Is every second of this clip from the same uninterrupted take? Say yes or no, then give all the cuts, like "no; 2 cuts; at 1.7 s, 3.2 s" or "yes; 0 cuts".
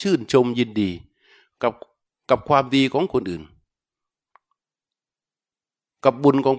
yes; 0 cuts